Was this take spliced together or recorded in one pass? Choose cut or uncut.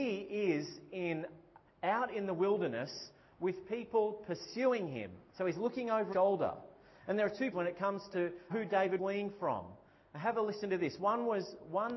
cut